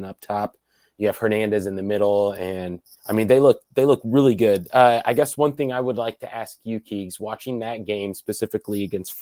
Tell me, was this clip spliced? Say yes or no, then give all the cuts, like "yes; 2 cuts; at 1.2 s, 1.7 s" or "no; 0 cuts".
yes; 1 cut; at 3.0 s